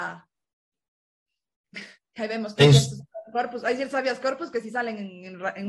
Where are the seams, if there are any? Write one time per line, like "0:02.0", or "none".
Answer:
none